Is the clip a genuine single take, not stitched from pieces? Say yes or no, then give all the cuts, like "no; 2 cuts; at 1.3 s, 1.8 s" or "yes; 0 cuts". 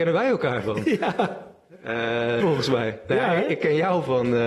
no; 1 cut; at 2.4 s